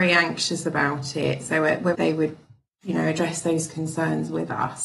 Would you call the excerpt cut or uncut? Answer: cut